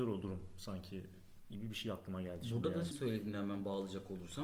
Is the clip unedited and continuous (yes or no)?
no